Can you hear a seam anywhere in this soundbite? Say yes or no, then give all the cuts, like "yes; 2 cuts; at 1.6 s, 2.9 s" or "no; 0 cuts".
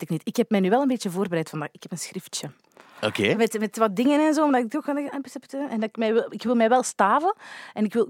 no; 0 cuts